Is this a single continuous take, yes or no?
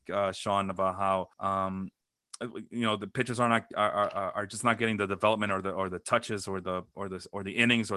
no